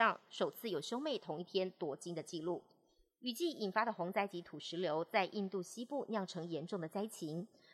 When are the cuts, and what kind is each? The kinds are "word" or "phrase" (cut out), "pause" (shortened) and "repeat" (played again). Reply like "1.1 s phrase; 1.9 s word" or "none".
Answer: none